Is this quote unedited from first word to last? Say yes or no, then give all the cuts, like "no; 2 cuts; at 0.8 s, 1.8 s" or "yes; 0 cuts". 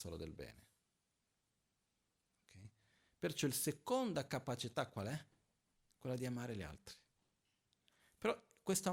yes; 0 cuts